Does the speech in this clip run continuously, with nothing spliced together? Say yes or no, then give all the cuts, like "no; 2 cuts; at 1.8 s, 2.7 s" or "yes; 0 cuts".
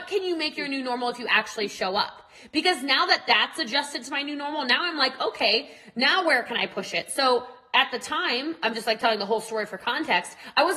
yes; 0 cuts